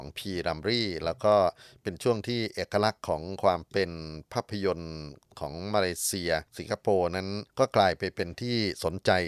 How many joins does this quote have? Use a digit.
3